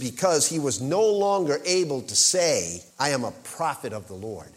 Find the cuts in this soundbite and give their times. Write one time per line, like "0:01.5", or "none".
0:02.9